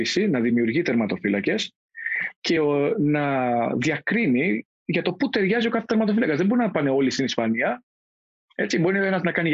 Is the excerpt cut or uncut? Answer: uncut